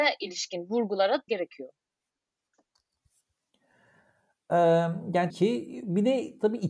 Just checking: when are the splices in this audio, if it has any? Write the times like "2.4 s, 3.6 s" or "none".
1.3 s, 5.3 s